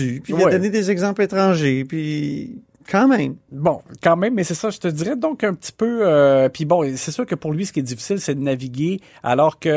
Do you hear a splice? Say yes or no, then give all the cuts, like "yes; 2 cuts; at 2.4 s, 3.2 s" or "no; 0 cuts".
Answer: no; 0 cuts